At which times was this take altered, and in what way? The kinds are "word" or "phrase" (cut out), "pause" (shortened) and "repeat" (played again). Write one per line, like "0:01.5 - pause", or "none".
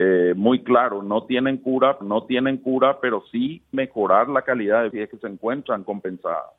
0:02.0 - repeat
0:03.7 - word
0:04.9 - word